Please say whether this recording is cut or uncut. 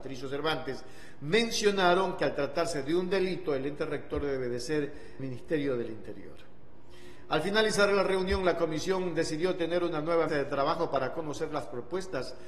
cut